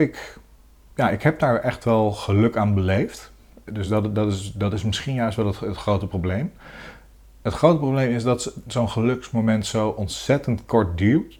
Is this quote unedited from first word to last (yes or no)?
yes